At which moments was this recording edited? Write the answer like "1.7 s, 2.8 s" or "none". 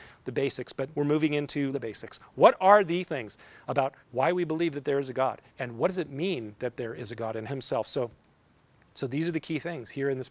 0.9 s, 1.7 s, 3.1 s, 4.0 s, 5.5 s, 7.5 s